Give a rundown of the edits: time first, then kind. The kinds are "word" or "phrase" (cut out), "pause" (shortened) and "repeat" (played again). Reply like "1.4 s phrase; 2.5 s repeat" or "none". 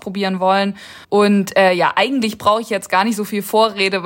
1.0 s pause

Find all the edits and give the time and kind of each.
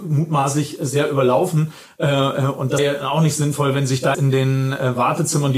2.8 s word; 4.1 s word

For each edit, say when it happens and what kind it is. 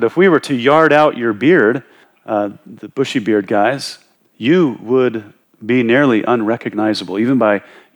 none

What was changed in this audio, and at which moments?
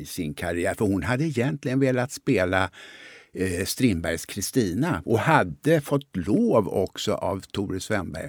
none

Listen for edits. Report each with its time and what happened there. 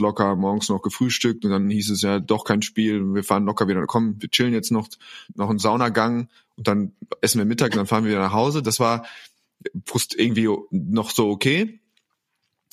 5.3 s pause

